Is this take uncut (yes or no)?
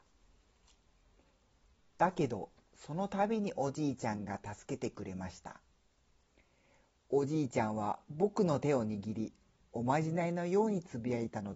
yes